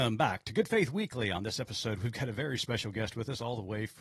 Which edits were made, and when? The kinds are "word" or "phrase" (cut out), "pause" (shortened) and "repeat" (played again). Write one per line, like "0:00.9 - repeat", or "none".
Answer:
none